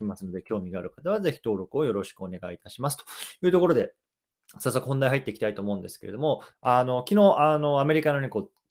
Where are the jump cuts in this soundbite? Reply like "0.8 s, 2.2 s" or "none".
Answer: 6.5 s